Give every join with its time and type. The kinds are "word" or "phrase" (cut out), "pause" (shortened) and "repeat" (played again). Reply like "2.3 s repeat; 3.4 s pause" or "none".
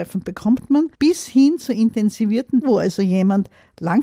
0.9 s pause; 2.6 s word